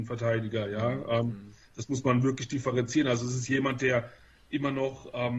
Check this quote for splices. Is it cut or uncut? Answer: uncut